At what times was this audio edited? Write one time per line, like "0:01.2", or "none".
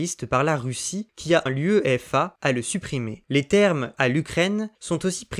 0:01.5
0:03.9

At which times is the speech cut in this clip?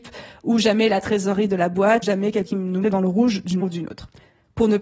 0:02.0
0:02.5
0:02.8
0:03.6

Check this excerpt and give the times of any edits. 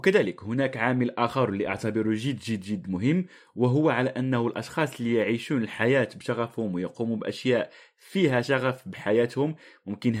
none

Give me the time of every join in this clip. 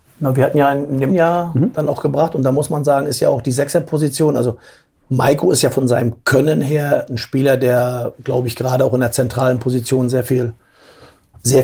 0:01.1

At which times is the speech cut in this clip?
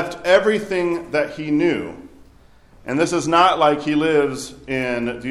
none

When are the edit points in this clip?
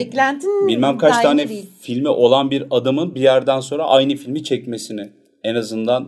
none

